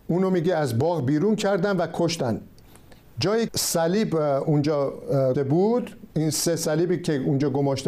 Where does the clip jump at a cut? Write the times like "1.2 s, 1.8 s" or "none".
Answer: 3.5 s, 5.3 s, 6.1 s